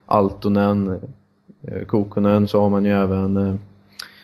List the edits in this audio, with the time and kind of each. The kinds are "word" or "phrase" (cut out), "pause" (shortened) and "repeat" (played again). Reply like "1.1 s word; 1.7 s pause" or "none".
none